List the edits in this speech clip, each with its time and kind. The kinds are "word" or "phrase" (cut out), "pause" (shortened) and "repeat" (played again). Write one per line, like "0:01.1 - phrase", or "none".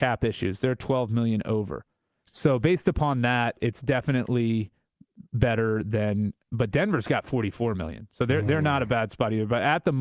none